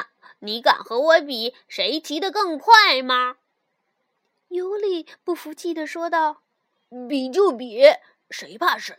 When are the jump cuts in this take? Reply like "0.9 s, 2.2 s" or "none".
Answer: none